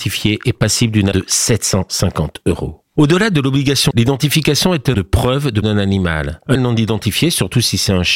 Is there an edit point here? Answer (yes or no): yes